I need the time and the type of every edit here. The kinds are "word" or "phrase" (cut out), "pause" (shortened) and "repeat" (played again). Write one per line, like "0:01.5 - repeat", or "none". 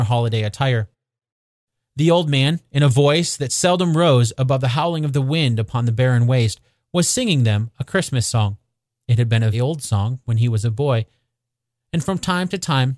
0:09.5 - word